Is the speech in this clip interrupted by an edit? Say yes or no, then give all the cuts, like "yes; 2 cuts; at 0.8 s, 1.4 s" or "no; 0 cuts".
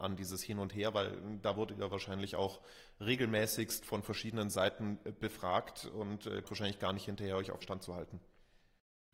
yes; 2 cuts; at 6.4 s, 7.6 s